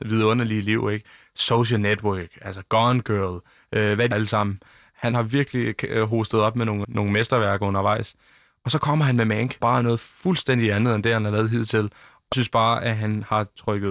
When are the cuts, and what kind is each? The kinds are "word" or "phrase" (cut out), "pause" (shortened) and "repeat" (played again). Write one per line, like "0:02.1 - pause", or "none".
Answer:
0:04.1 - word
0:05.1 - word
0:06.8 - word
0:09.6 - word
0:12.3 - word